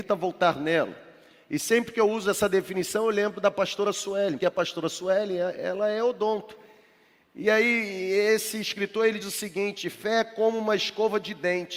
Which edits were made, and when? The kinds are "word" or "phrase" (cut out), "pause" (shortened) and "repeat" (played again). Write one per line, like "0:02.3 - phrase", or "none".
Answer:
0:04.4 - word
0:09.2 - word